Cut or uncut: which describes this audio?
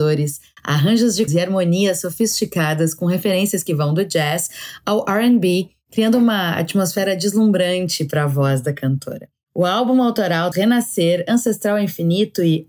cut